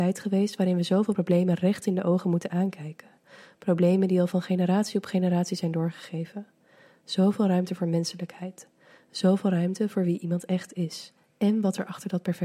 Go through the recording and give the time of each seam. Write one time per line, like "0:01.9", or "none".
none